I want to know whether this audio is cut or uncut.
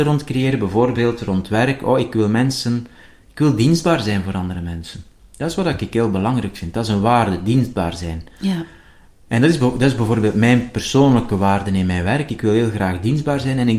uncut